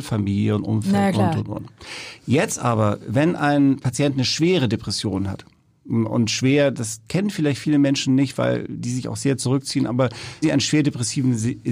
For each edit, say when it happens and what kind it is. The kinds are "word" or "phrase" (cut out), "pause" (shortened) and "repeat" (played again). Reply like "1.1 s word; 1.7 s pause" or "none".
10.4 s word